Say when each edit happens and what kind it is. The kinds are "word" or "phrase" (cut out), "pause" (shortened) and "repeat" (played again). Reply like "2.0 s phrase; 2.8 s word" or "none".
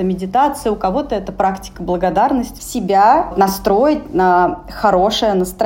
2.6 s phrase